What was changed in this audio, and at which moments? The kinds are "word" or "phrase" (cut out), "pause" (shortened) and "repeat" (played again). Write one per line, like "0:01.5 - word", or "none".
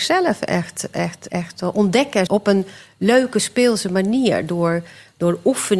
0:01.3 - word
0:02.3 - word